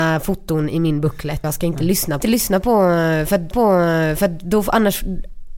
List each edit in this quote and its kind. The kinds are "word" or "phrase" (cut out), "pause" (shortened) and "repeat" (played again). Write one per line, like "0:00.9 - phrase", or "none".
0:01.4 - word
0:02.2 - phrase
0:03.5 - repeat